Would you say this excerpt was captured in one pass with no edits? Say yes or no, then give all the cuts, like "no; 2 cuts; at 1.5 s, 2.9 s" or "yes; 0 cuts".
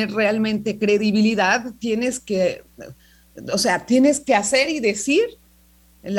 yes; 0 cuts